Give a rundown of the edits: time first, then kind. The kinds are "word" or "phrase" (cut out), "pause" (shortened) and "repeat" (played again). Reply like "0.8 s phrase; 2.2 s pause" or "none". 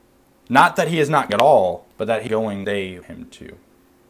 1.3 s word; 1.9 s pause; 2.3 s phrase; 2.6 s word; 3.0 s word

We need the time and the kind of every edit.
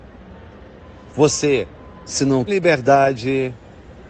2.5 s word

